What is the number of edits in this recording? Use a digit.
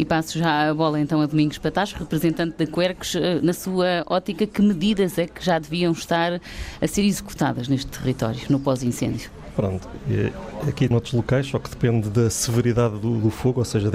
1